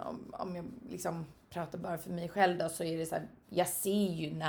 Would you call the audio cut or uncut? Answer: uncut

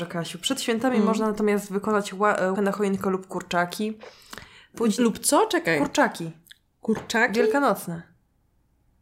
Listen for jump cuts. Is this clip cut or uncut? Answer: cut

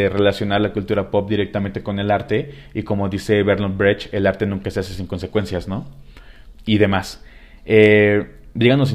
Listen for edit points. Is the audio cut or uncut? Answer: uncut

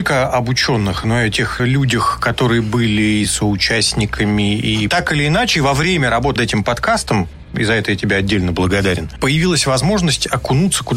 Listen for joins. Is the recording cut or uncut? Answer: cut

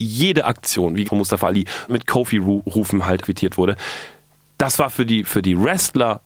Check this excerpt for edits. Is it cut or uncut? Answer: cut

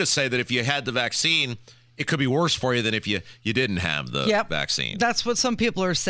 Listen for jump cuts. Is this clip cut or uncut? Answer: uncut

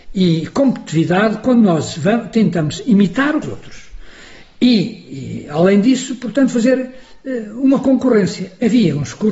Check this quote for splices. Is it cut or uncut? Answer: cut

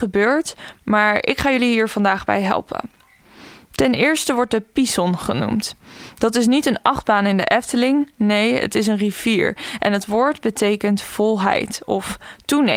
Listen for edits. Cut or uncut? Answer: uncut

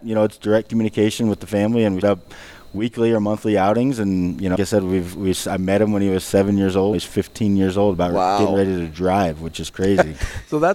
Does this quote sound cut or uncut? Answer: cut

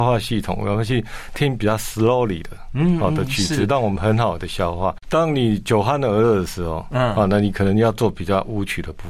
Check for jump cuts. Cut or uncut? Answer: uncut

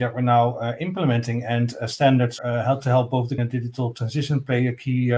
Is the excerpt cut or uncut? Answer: cut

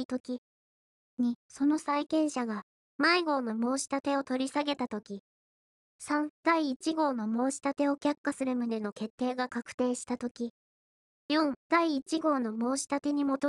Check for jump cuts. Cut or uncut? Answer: uncut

